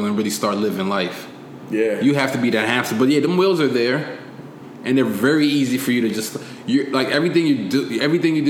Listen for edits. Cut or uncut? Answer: uncut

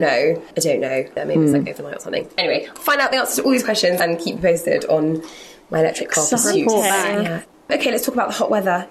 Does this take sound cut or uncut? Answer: uncut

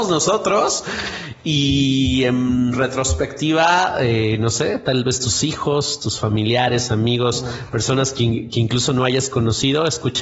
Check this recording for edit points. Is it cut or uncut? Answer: uncut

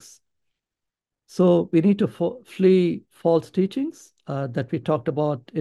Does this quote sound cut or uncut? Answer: uncut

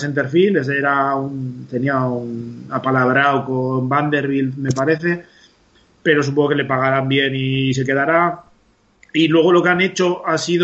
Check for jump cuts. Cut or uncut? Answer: uncut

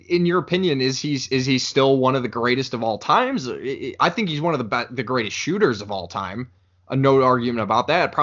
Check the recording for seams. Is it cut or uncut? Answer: uncut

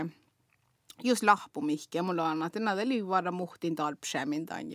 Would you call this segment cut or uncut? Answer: uncut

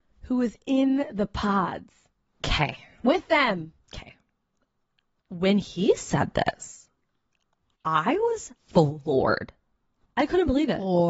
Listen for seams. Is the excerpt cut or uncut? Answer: cut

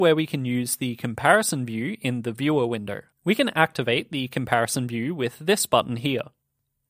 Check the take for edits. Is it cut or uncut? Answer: cut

